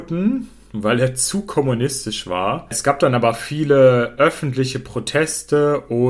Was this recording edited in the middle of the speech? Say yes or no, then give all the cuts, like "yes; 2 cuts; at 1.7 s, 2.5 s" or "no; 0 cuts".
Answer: no; 0 cuts